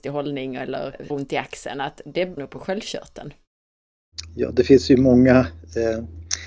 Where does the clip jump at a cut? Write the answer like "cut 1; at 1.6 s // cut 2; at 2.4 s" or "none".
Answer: cut 1; at 1.1 s // cut 2; at 2.4 s